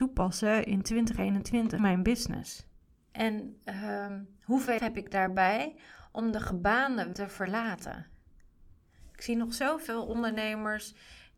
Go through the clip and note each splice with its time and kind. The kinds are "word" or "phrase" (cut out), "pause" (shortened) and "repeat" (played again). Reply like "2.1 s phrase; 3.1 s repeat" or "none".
1.8 s word; 2.8 s pause; 4.8 s word; 7.1 s word